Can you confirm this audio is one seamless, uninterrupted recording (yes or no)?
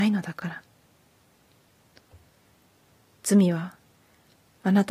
yes